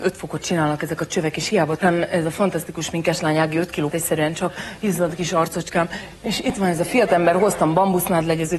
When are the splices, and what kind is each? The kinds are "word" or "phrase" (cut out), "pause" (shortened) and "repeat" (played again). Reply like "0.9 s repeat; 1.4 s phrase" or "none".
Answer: 1.8 s word; 3.9 s word; 5.1 s word